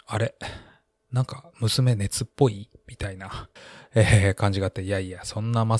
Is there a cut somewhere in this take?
yes; 1 cut; at 3.6 s

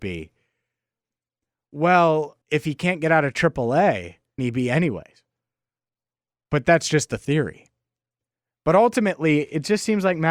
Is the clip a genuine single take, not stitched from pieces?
no; 2 cuts; at 2.4 s, 4.4 s

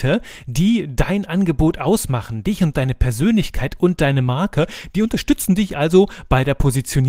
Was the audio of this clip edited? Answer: no; 0 cuts

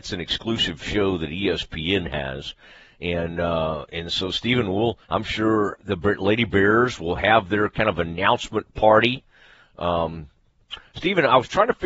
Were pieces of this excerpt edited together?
yes; 2 cuts; at 5.0 s, 5.7 s

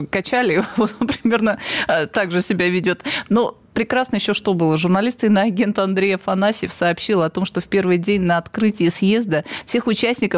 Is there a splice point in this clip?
no; 0 cuts

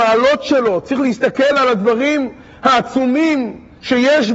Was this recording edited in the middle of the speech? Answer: no; 0 cuts

